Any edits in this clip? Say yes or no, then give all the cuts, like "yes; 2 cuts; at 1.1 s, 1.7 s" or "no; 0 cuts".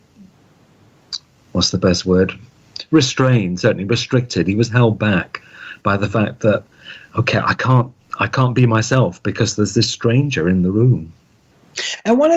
no; 0 cuts